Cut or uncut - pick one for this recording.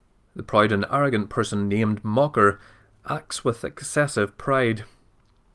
uncut